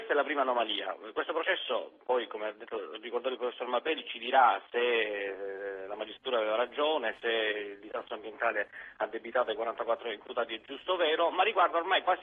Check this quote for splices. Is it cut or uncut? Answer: uncut